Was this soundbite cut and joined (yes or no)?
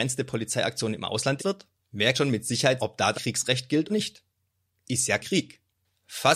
yes